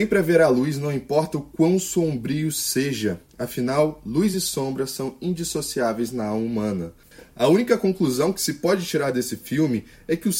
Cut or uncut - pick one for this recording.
uncut